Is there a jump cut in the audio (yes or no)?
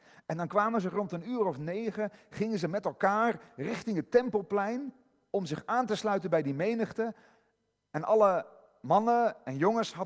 no